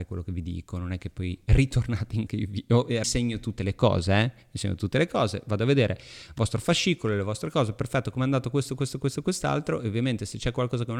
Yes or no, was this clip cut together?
yes